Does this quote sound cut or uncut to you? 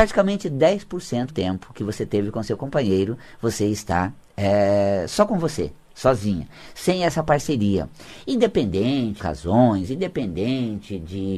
cut